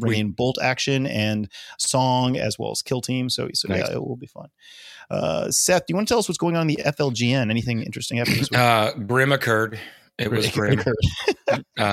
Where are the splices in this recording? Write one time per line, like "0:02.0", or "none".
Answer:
none